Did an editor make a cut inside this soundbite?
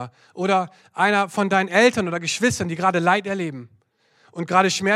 no; 0 cuts

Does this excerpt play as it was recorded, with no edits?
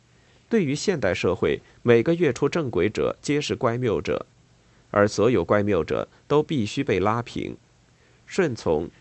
yes; 0 cuts

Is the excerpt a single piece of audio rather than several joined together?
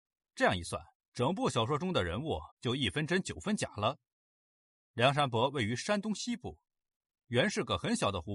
no; 2 cuts; at 1.0 s, 2.5 s

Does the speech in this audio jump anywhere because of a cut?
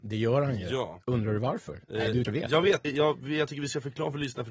yes; 2 cuts; at 2.2 s, 2.8 s

